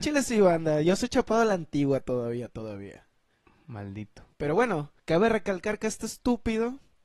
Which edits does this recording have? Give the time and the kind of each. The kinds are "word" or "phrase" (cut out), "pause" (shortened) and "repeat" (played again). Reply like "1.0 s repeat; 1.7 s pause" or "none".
4.3 s pause; 5.0 s pause

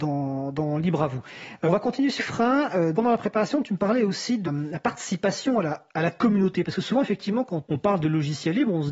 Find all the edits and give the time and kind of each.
1.7 s word; 2.2 s word; 2.9 s word; 4.4 s word; 7.6 s word

